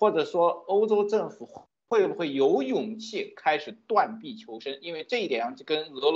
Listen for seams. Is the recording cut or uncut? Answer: uncut